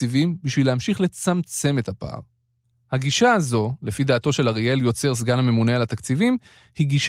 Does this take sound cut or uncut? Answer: uncut